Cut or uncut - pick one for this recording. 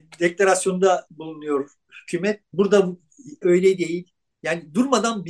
cut